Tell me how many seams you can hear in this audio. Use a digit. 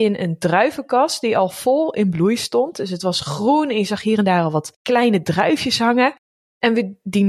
0